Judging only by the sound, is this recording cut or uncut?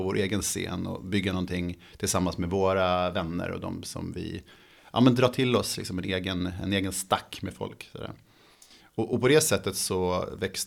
uncut